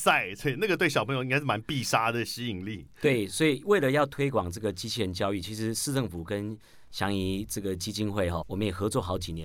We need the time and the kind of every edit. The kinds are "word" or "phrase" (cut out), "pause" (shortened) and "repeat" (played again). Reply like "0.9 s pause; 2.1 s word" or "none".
8.4 s word